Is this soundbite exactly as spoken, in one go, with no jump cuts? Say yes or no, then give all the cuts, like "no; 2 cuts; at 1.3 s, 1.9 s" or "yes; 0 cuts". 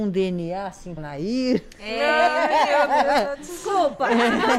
no; 1 cut; at 1.0 s